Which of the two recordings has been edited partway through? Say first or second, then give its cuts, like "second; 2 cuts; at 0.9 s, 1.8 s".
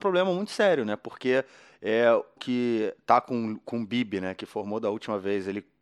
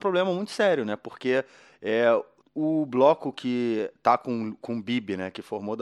first; 1 cut; at 2.4 s